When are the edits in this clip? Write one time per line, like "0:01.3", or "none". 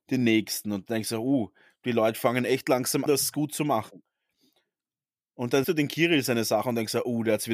0:03.1
0:05.6